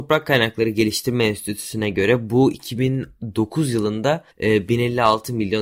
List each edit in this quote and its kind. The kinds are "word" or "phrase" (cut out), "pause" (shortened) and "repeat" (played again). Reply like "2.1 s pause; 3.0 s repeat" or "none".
4.3 s pause